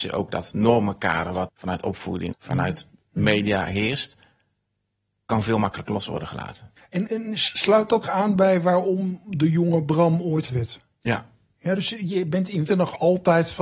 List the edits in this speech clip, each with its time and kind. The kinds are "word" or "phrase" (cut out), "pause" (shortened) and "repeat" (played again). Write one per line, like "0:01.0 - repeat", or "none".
0:01.5 - word
0:02.3 - word
0:07.1 - word
0:08.0 - word
0:10.5 - word
0:12.7 - word

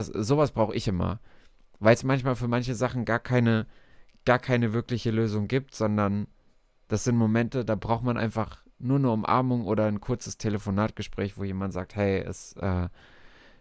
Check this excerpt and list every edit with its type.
none

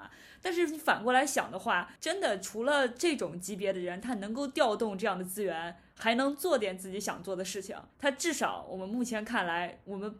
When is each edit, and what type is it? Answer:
0:02.0 - pause
0:07.9 - pause

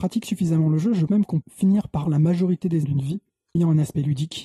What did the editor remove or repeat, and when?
0:01.1 - word
0:01.4 - word
0:02.0 - word
0:02.8 - word
0:03.6 - word

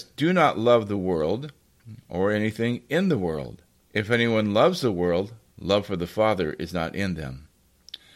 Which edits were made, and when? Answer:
0:03.8 - pause

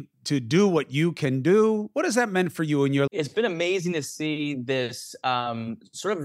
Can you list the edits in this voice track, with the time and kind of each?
0:03.1 - word

